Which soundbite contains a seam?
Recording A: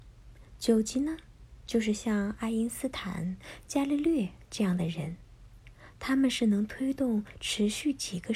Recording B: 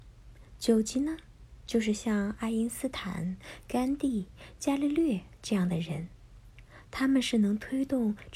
A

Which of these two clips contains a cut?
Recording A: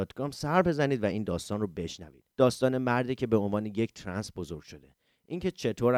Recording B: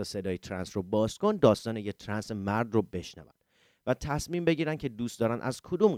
A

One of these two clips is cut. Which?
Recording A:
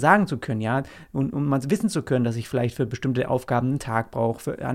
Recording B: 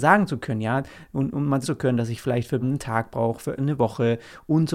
B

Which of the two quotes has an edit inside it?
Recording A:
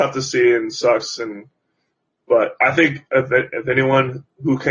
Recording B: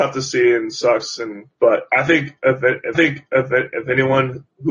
B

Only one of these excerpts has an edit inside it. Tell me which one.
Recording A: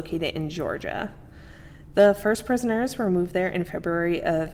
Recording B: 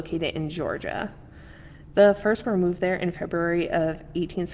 B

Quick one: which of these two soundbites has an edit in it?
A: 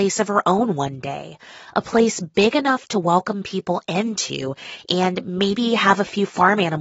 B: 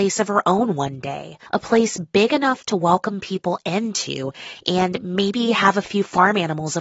B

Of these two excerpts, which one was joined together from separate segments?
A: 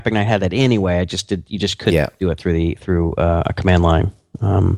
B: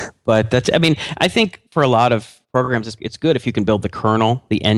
B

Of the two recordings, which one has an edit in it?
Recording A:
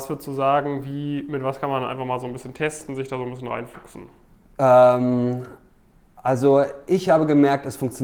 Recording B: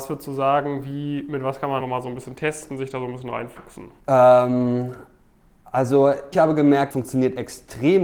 B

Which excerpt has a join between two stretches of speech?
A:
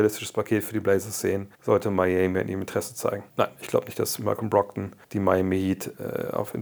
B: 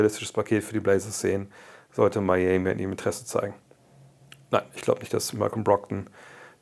A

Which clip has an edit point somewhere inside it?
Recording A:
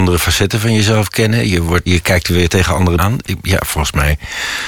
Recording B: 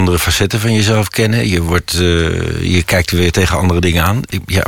A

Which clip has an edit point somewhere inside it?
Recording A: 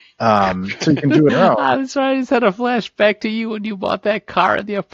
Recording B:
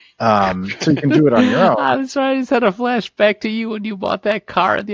A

